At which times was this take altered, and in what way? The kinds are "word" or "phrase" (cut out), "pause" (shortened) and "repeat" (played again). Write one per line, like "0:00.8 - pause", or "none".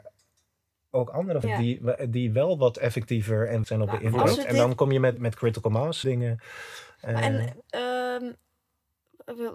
0:01.4 - word
0:03.6 - phrase
0:05.2 - word
0:06.0 - word